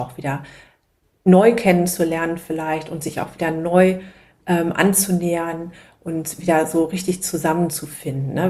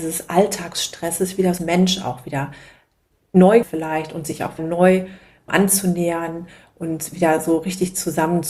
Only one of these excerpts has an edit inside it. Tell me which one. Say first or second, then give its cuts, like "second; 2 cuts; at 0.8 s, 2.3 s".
second; 4 cuts; at 1.6 s, 3.6 s, 4.6 s, 5.5 s